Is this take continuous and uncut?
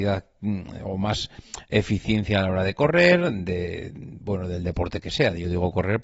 yes; 0 cuts

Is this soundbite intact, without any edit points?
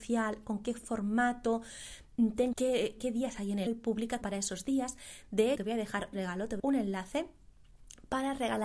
no; 8 cuts; at 2.5 s, 3.0 s, 3.4 s, 3.7 s, 4.2 s, 5.6 s, 6.1 s, 6.6 s

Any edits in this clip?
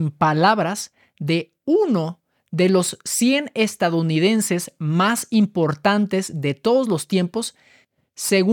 no; 0 cuts

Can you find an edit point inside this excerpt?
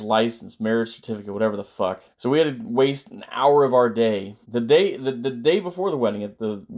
yes; 2 cuts; at 2.1 s, 4.4 s

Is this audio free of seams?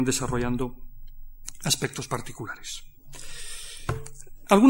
yes; 0 cuts

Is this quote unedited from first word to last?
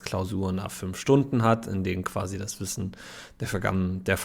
yes; 0 cuts

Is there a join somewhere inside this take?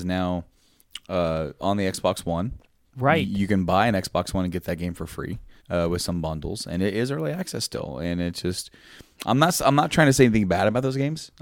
yes; 1 cut; at 5.6 s

